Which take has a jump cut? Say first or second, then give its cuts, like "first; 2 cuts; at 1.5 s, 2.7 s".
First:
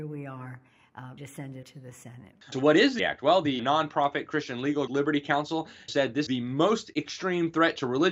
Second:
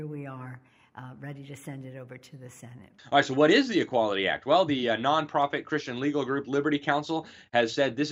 first; 8 cuts; at 1.2 s, 1.6 s, 2.5 s, 3.0 s, 3.6 s, 4.9 s, 5.9 s, 6.3 s